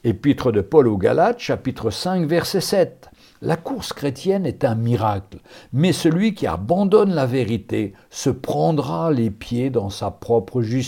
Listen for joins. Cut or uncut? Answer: uncut